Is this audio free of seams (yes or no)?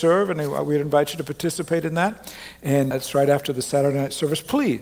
no